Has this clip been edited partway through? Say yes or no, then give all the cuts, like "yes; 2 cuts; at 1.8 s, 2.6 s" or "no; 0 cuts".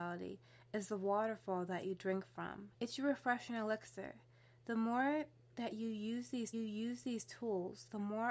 yes; 2 cuts; at 2.7 s, 6.5 s